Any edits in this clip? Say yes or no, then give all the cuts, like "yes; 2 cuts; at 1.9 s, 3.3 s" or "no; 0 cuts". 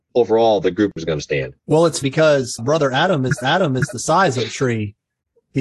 yes; 4 cuts; at 1.6 s, 2.0 s, 2.6 s, 3.4 s